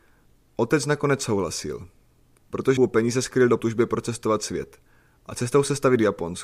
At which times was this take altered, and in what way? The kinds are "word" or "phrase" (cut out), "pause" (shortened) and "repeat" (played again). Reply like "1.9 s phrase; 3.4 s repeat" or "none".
2.8 s phrase; 3.6 s phrase